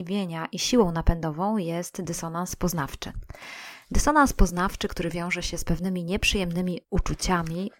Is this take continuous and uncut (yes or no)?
no